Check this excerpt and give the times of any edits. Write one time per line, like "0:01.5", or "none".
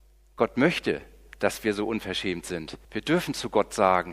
0:02.8